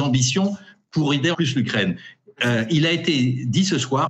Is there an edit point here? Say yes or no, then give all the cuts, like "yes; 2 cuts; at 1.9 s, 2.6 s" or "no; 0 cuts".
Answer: yes; 1 cut; at 1.3 s